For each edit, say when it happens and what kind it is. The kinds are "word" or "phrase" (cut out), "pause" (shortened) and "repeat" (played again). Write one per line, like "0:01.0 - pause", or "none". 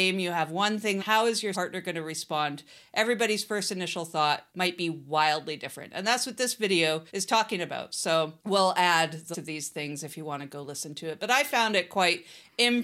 0:01.0 - phrase
0:01.5 - word
0:04.5 - pause
0:07.1 - pause
0:08.4 - pause
0:09.3 - word